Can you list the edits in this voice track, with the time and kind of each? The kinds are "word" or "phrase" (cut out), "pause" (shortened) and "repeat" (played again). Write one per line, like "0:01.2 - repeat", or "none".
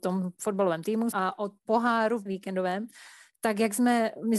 0:01.1 - word
0:01.7 - word
0:02.3 - word